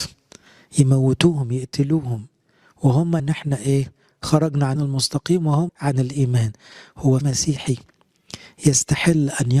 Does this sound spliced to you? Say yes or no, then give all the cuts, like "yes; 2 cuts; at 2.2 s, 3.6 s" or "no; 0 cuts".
yes; 4 cuts; at 3.2 s, 4.8 s, 5.7 s, 7.2 s